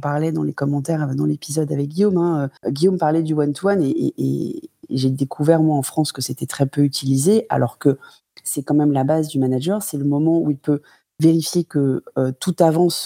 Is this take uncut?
no; 1 cut; at 2.6 s

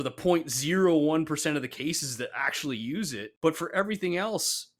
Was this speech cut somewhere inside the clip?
no; 0 cuts

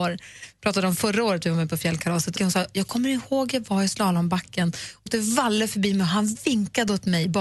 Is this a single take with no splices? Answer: no; 2 cuts; at 2.4 s, 5.1 s

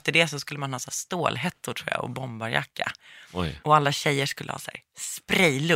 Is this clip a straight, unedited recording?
yes; 0 cuts

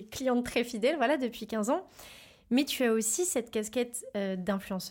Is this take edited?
no; 0 cuts

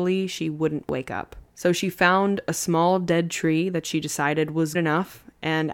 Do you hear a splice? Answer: yes; 2 cuts; at 1.5 s, 4.7 s

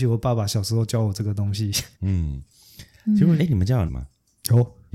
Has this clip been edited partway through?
yes; 3 cuts; at 1.9 s, 3.4 s, 3.9 s

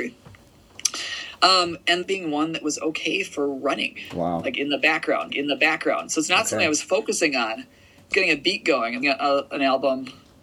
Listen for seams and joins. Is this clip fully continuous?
no; 4 cuts; at 2.0 s, 5.3 s, 8.1 s, 9.0 s

